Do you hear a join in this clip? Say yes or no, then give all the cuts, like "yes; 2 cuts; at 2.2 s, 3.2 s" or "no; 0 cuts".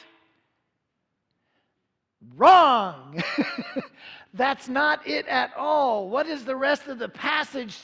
no; 0 cuts